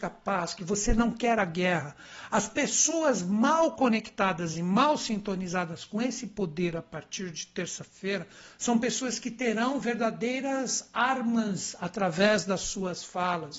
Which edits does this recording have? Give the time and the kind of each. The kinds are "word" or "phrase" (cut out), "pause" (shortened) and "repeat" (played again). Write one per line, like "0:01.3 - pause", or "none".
none